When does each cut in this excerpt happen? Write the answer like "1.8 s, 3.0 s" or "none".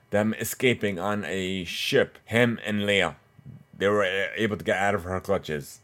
2.2 s